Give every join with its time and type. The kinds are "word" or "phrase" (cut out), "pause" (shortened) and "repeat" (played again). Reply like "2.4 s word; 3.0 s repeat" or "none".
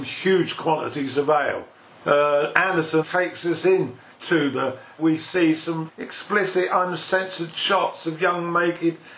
1.8 s pause; 3.0 s word; 4.1 s word; 5.0 s phrase; 5.9 s word